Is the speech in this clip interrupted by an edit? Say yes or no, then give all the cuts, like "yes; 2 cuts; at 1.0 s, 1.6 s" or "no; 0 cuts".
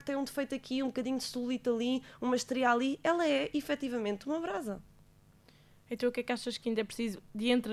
no; 0 cuts